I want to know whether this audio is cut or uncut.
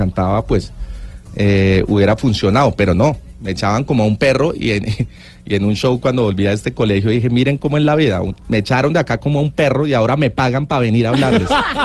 uncut